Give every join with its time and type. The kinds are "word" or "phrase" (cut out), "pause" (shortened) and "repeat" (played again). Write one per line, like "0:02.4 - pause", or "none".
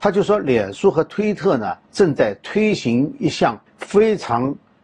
0:01.8 - pause
0:03.7 - pause